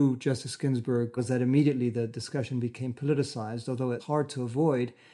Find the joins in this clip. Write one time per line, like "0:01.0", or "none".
0:01.2
0:04.0